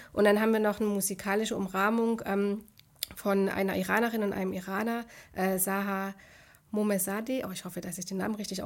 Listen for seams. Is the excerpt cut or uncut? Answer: uncut